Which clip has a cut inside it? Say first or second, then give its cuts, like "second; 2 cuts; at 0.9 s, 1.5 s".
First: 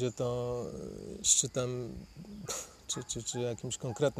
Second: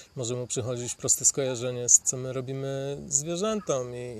second; 2 cuts; at 1.0 s, 2.0 s